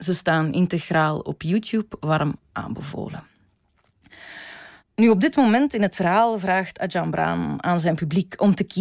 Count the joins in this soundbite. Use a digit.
1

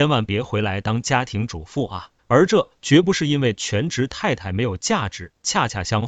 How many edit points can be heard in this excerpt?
1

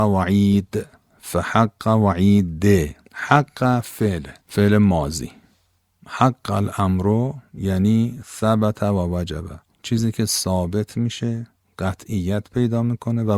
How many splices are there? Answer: 3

